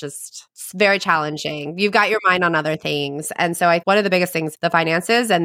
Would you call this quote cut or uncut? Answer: cut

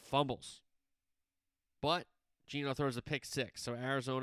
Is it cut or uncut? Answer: uncut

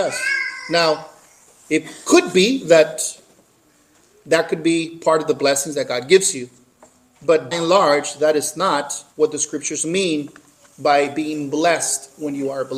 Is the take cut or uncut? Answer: cut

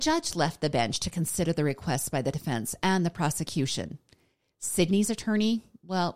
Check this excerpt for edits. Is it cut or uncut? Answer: uncut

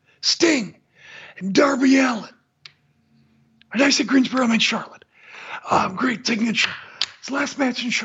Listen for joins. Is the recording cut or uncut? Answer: uncut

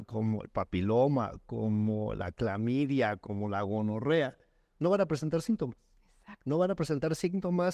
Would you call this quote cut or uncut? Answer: uncut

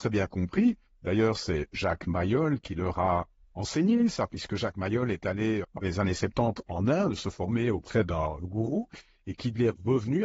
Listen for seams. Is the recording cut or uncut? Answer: cut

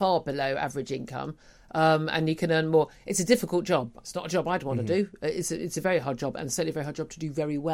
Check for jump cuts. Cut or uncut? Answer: uncut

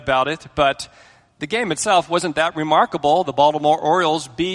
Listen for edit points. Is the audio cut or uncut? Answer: uncut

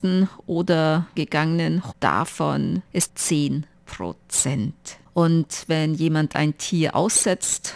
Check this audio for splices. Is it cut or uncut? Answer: cut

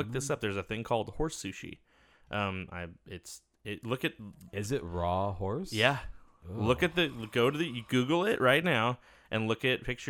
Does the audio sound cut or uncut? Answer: uncut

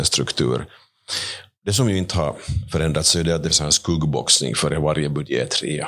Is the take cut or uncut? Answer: cut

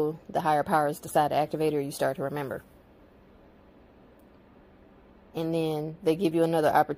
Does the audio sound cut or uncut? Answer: uncut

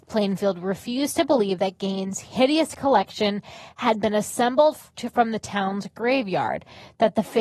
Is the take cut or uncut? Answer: uncut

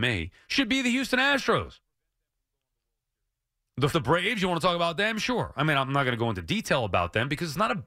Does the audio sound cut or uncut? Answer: cut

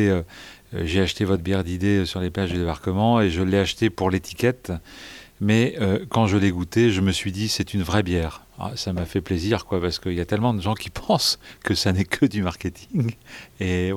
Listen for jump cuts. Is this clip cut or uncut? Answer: uncut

